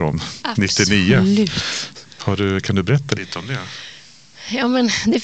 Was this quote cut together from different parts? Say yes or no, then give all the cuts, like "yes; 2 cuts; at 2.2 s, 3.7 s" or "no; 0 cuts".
no; 0 cuts